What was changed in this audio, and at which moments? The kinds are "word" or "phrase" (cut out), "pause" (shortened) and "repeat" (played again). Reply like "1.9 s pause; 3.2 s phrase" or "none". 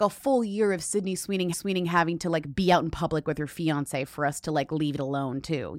1.5 s repeat